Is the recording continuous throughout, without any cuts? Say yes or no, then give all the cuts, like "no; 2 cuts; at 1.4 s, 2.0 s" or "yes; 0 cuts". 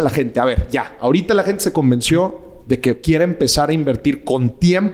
yes; 0 cuts